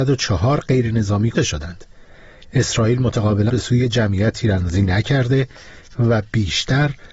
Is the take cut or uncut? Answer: cut